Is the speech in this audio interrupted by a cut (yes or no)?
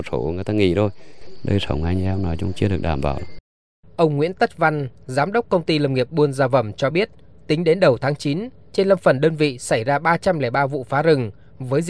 no